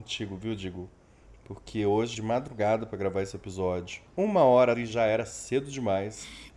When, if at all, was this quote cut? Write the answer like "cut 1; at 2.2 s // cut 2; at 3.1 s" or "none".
cut 1; at 2.1 s // cut 2; at 4.1 s // cut 3; at 4.7 s